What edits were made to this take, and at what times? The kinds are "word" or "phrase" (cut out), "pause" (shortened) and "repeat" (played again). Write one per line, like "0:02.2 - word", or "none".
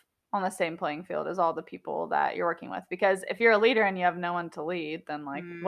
none